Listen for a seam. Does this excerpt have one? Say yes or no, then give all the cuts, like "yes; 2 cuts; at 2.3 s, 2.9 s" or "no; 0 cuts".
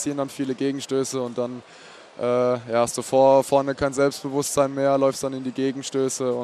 no; 0 cuts